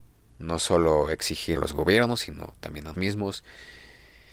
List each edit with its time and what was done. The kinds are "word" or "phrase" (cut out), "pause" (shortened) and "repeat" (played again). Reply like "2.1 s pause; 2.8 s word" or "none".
1.6 s word; 2.9 s word

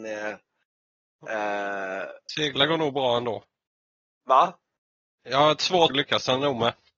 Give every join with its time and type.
5.9 s word

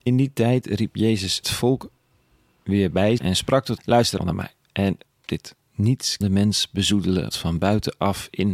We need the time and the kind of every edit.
1.4 s word; 3.2 s word; 3.8 s word; 4.2 s word; 5.3 s word; 6.2 s word; 7.3 s word

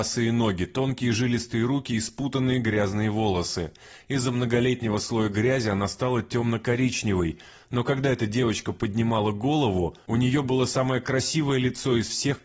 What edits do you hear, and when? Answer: none

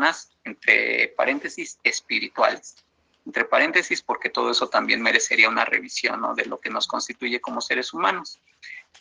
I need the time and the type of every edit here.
none

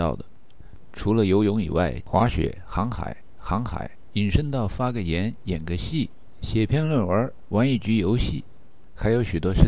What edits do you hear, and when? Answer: 2.0 s phrase; 3.4 s repeat

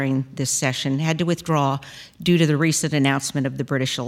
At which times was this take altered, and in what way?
none

